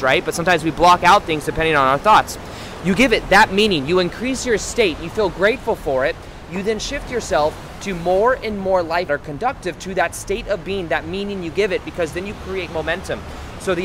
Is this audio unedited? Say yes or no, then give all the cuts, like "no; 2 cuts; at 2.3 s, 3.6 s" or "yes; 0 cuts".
no; 1 cut; at 9.1 s